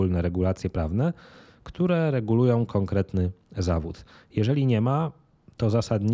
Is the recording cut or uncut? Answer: uncut